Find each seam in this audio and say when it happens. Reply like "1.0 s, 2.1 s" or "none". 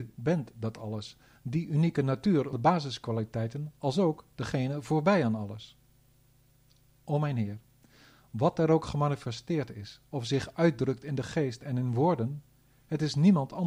2.5 s